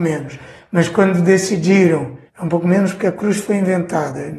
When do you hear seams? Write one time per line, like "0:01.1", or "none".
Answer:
0:02.3